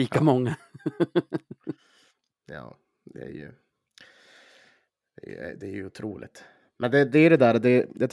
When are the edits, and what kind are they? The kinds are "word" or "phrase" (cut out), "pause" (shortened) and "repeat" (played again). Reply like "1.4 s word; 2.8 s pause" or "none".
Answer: none